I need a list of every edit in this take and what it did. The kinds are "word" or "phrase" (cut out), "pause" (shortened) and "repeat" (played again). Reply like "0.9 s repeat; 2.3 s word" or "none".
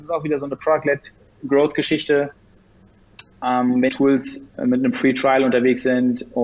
3.9 s word